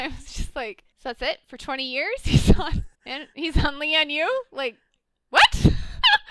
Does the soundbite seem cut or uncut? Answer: cut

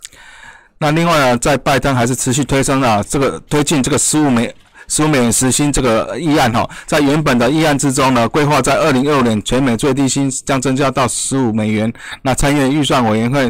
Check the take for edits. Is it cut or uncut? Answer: uncut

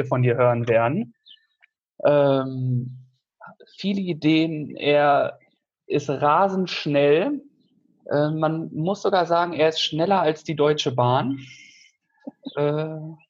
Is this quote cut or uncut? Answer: uncut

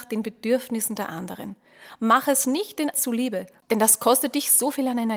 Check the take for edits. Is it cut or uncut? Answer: cut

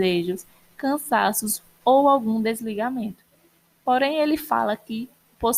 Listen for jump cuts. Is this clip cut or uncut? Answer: uncut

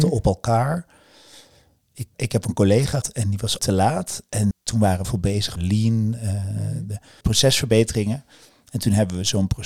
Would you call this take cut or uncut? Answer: cut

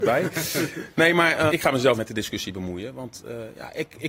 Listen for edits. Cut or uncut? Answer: cut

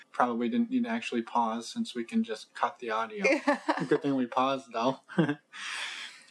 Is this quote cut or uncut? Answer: uncut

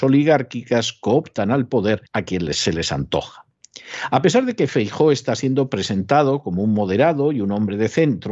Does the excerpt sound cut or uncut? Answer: cut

